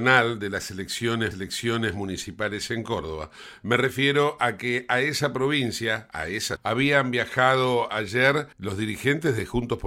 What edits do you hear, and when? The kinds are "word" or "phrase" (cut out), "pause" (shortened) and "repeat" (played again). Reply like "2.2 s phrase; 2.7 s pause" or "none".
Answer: 1.3 s repeat; 6.6 s word; 8.5 s pause